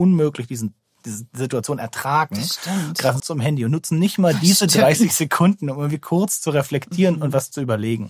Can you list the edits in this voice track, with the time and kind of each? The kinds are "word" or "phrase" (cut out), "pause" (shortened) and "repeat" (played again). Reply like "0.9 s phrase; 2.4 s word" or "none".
3.2 s word